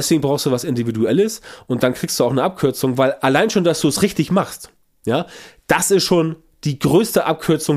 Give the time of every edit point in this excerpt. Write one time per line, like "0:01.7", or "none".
none